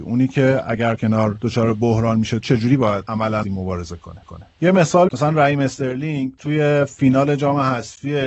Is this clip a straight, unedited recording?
no; 5 cuts; at 1.0 s, 2.4 s, 3.4 s, 4.2 s, 5.1 s

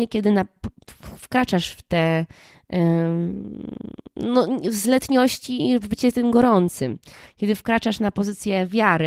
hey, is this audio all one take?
yes; 0 cuts

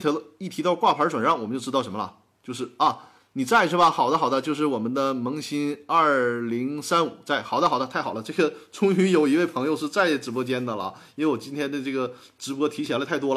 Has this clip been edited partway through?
no; 0 cuts

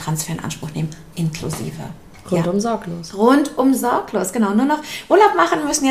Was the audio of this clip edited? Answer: yes; 1 cut; at 1.1 s

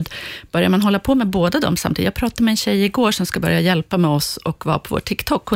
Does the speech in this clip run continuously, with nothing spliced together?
yes; 0 cuts

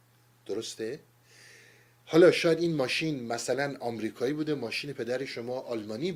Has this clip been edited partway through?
no; 0 cuts

